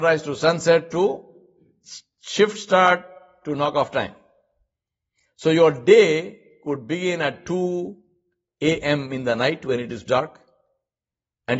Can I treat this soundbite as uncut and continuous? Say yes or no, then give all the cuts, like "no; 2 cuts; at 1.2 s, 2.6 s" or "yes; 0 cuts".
no; 1 cut; at 10.0 s